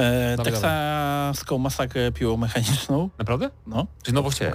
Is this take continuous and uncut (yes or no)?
yes